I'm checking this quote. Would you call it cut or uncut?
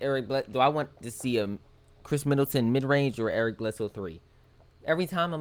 uncut